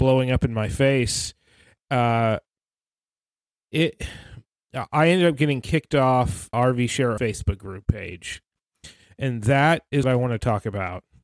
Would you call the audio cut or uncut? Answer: cut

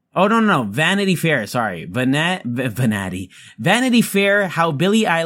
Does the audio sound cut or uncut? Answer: uncut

